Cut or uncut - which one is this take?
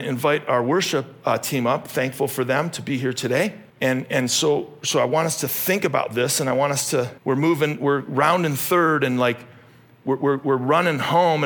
cut